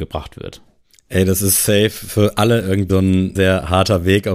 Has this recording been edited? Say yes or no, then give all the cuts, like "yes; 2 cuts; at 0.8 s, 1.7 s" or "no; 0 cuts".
yes; 2 cuts; at 2.9 s, 3.4 s